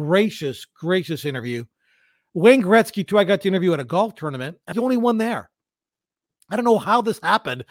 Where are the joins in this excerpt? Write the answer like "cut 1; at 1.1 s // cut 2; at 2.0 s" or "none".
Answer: cut 1; at 4.7 s